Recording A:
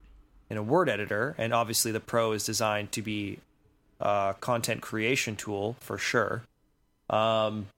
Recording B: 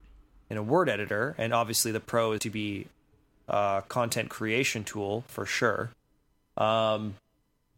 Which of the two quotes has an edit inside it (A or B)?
B